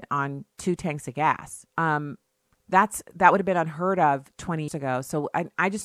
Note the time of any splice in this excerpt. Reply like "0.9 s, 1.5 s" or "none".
1.7 s, 4.7 s

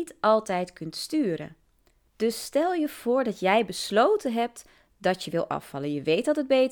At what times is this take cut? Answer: none

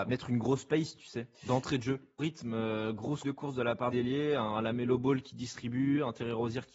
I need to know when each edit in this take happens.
1.3 s, 2.2 s, 3.2 s, 3.9 s

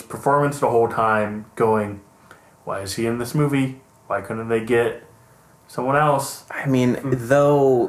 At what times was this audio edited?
none

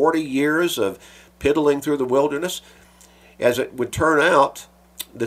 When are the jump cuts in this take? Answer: none

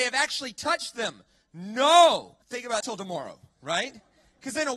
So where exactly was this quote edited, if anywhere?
2.4 s, 2.8 s

